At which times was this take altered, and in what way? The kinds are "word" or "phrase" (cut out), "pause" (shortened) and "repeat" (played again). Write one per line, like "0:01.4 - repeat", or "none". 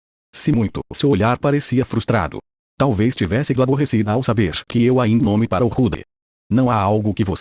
0:03.6 - word
0:05.2 - phrase

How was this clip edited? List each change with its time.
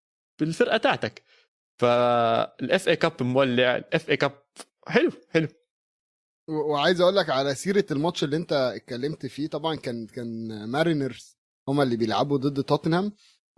none

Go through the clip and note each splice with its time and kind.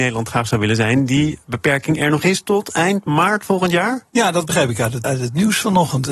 0:04.1 - pause
0:05.0 - word

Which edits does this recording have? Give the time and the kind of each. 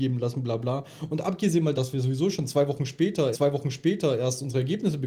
0:01.8 - word
0:03.3 - repeat

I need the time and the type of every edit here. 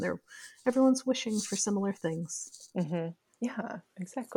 none

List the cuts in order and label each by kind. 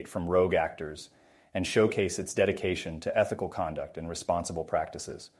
none

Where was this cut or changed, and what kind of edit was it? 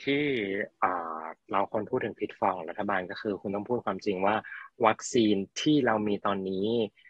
none

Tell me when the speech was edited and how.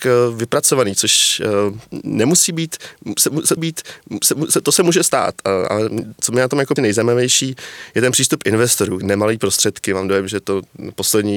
0:03.6 - repeat
0:06.8 - phrase
0:09.0 - phrase

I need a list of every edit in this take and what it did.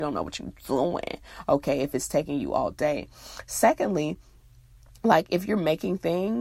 none

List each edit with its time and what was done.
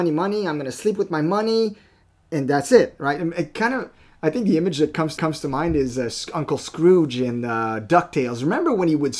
0:02.1 - word
0:05.2 - repeat

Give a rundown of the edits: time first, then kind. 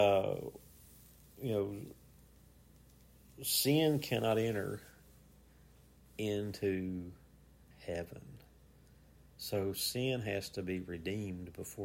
none

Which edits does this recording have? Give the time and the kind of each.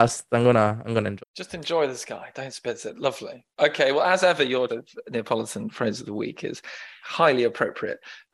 0:01.2 - word
0:04.7 - word

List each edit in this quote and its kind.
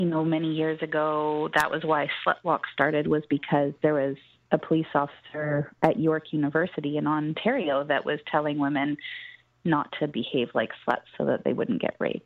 none

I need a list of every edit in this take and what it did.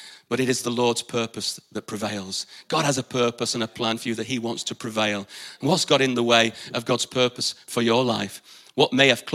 none

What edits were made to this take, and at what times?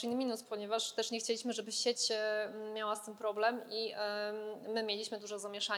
none

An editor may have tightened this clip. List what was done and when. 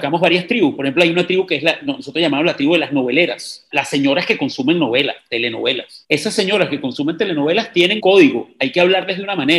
0:03.7 - word
0:08.0 - word

